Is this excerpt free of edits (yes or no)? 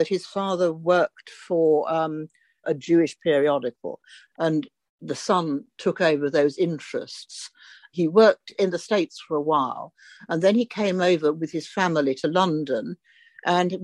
yes